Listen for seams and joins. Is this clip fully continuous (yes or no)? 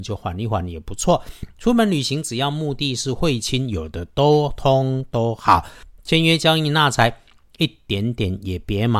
yes